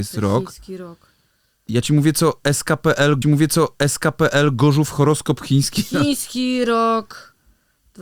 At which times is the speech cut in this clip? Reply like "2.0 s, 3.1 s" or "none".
3.2 s